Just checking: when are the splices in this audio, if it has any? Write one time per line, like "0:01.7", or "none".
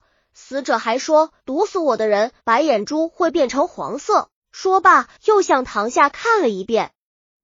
0:01.4
0:02.4
0:04.4
0:05.2